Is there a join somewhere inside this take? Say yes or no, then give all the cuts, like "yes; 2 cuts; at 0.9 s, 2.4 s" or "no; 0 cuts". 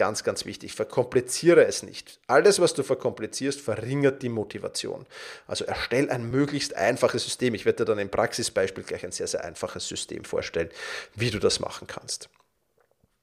no; 0 cuts